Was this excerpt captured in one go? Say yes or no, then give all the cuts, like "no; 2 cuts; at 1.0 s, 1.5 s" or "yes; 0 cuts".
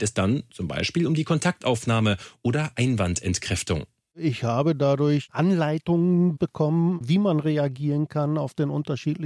yes; 0 cuts